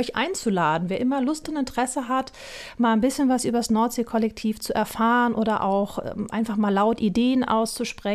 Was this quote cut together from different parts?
no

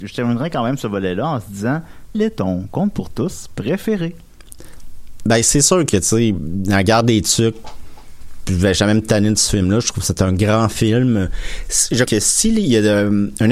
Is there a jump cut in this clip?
yes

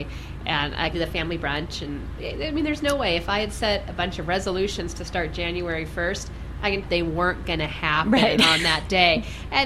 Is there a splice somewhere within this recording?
yes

